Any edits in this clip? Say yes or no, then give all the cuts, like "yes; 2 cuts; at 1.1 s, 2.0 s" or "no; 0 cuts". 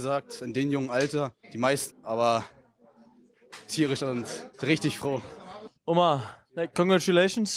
yes; 5 cuts; at 1.4 s, 1.9 s, 4.0 s, 4.5 s, 5.8 s